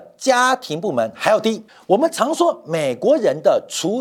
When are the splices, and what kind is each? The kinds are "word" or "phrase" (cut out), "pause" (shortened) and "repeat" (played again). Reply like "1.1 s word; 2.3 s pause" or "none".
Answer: 1.7 s pause